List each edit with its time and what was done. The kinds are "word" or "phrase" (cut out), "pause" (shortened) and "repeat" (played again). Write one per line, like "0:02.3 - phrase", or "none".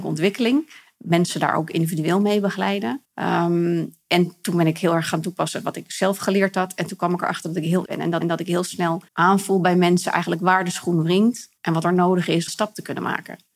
0:03.0 - pause
0:07.9 - word
0:08.2 - repeat
0:09.1 - pause
0:11.6 - pause
0:12.5 - phrase